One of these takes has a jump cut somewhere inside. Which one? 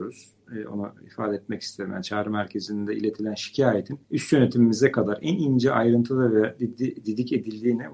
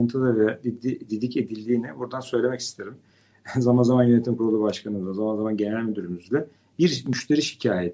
first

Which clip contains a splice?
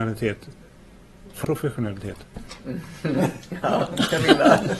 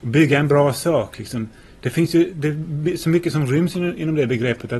first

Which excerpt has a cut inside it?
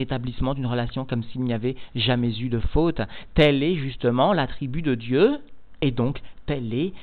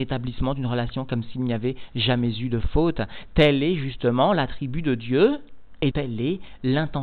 second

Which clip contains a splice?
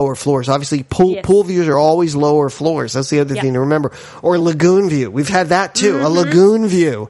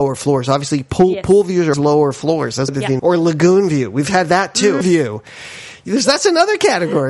second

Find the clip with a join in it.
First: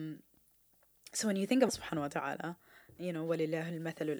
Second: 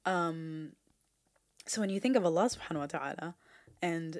first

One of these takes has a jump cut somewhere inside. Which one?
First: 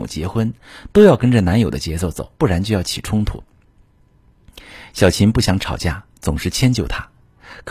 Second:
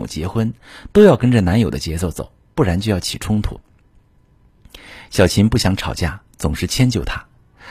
first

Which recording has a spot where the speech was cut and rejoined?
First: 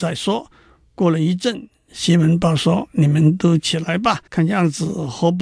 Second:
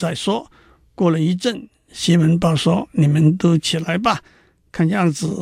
first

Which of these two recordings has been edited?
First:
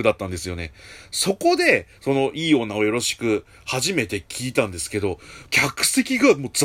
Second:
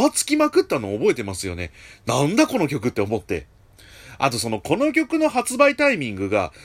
first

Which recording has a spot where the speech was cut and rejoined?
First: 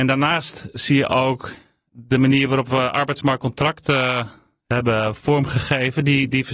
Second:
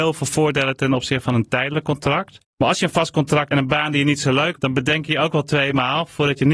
second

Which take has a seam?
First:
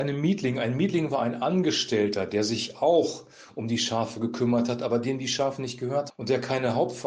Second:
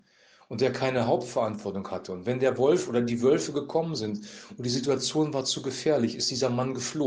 first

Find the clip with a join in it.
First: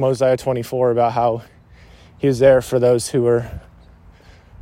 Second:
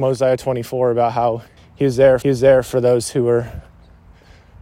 second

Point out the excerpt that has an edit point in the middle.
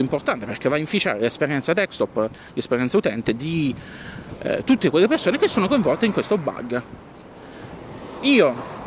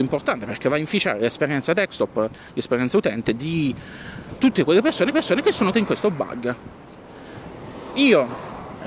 second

